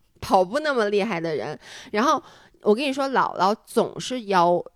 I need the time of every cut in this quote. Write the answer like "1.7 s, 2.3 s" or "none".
none